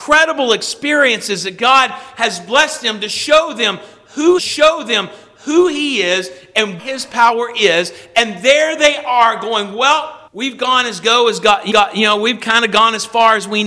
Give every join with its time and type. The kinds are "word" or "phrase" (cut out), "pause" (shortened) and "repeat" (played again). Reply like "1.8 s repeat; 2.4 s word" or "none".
4.4 s repeat; 6.8 s word; 10.3 s pause; 11.7 s repeat